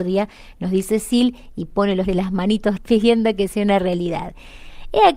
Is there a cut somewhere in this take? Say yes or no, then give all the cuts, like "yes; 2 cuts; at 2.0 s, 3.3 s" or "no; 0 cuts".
yes; 2 cuts; at 2.0 s, 2.8 s